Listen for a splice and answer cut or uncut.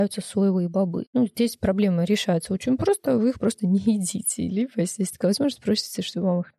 uncut